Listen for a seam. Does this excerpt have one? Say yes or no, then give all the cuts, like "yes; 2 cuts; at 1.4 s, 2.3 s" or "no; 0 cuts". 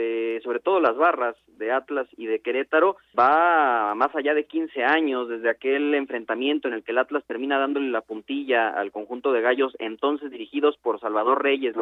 yes; 1 cut; at 3.1 s